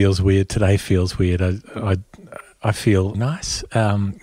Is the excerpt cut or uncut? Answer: cut